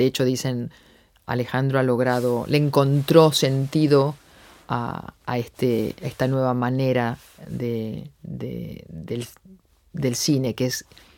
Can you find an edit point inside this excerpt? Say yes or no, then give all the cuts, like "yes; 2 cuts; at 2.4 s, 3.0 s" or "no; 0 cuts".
no; 0 cuts